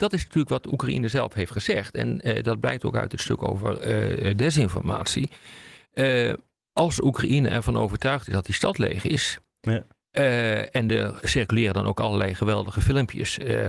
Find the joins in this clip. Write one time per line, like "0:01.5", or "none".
none